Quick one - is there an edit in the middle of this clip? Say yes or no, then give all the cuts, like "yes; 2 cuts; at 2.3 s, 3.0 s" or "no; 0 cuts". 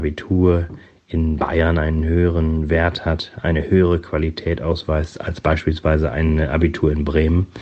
no; 0 cuts